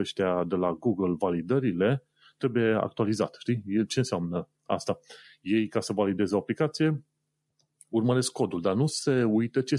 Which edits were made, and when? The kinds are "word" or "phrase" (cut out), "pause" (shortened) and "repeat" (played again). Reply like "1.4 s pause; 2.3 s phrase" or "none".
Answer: none